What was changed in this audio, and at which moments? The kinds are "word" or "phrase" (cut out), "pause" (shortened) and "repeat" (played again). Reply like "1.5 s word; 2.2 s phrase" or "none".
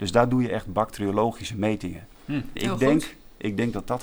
2.6 s word